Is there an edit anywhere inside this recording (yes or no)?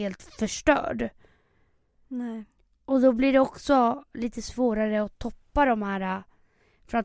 no